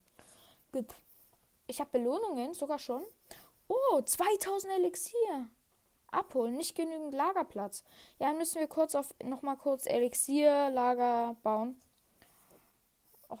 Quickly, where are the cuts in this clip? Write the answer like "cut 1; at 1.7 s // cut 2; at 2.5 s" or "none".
none